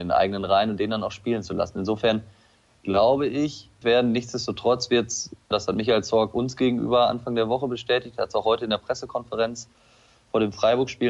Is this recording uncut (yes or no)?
no